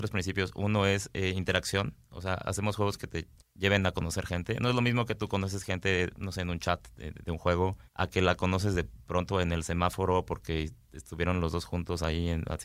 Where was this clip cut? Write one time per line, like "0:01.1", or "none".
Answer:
0:03.4
0:07.9